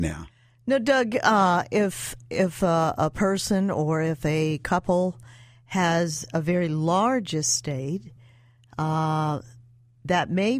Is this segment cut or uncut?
uncut